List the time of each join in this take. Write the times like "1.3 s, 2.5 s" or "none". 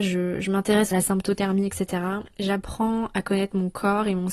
0.9 s, 2.3 s